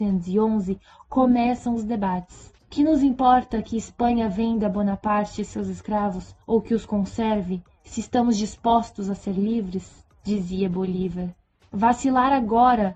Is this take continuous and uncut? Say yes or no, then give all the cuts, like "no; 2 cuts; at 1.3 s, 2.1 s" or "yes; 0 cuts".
no; 3 cuts; at 2.6 s, 6.4 s, 11.5 s